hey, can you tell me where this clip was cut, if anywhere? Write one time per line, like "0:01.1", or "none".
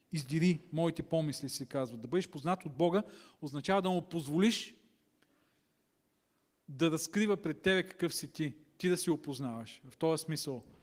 none